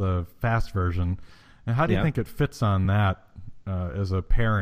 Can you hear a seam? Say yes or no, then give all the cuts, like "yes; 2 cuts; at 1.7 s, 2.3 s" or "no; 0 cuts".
no; 0 cuts